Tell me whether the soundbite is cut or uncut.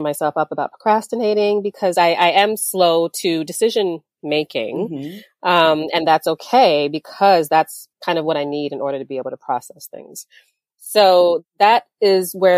uncut